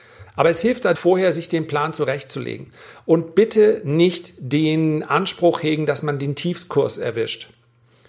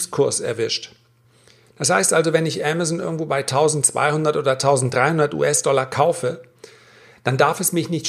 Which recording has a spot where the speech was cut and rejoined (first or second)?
first